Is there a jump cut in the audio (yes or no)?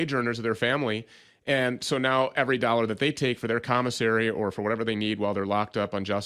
no